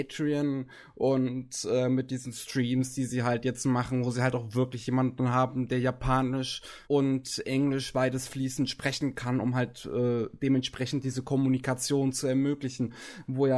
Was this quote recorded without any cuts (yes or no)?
no